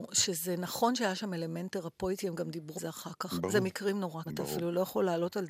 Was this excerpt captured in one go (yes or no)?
no